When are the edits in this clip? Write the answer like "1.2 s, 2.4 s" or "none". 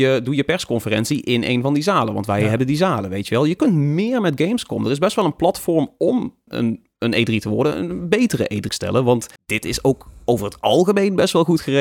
3.6 s, 6.5 s, 8.7 s, 9.4 s